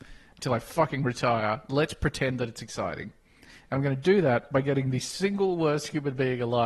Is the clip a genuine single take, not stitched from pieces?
yes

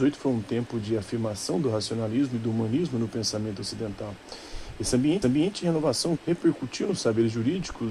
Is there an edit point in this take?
yes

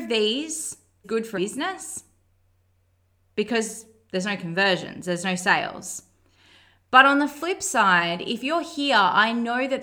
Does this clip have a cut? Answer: yes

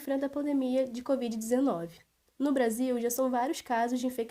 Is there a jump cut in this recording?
no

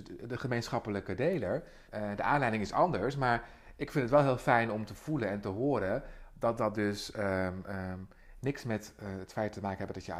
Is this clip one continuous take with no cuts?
no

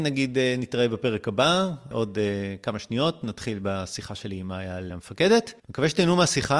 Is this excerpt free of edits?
no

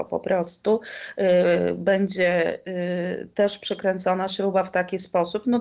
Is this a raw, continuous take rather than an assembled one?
yes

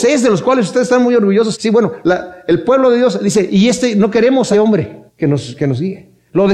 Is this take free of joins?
no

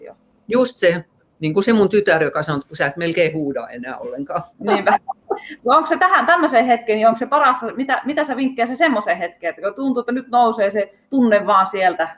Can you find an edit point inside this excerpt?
yes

